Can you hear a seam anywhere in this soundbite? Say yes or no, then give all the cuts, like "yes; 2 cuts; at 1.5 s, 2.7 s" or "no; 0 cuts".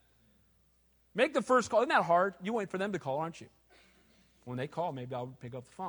no; 0 cuts